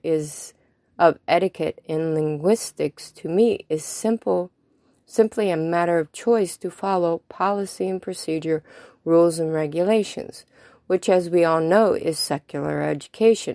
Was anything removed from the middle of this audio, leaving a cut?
no; 0 cuts

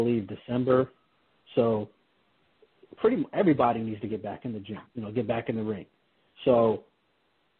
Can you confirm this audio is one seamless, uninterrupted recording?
no; 1 cut; at 4.9 s

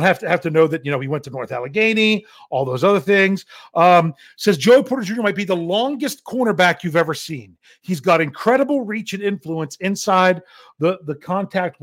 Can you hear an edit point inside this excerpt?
no; 0 cuts

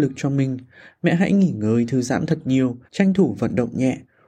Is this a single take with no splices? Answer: no; 1 cut; at 2.8 s

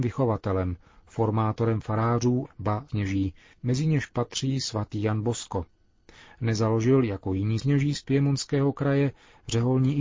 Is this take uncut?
no; 3 cuts; at 2.4 s, 2.9 s, 7.6 s

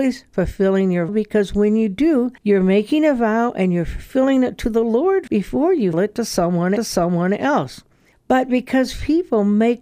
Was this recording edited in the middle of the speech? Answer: yes; 5 cuts; at 1.1 s, 2.4 s, 5.3 s, 5.9 s, 6.8 s

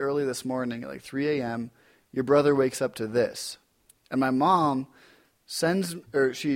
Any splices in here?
no; 0 cuts

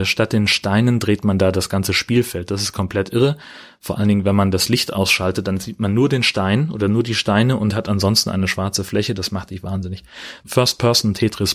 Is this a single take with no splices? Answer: yes; 0 cuts

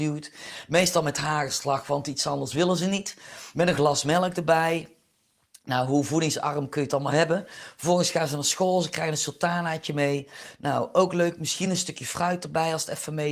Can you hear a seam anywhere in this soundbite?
no; 0 cuts

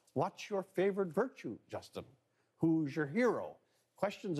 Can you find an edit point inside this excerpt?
no; 0 cuts

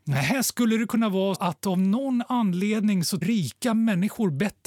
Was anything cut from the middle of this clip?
yes; 2 cuts; at 1.3 s, 3.2 s

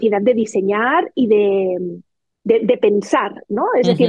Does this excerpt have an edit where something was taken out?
no; 0 cuts

